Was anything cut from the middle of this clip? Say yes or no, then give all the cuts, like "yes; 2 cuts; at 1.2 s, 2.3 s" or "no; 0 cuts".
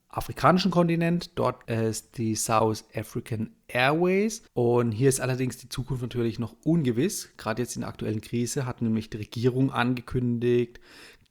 yes; 2 cuts; at 1.6 s, 4.5 s